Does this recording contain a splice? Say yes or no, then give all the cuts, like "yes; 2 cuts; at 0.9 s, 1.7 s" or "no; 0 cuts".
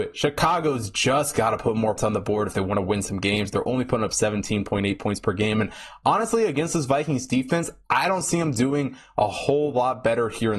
yes; 1 cut; at 2.0 s